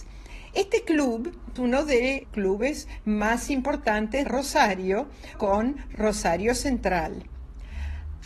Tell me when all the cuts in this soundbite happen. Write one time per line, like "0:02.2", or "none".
0:01.6
0:02.2
0:04.2
0:05.3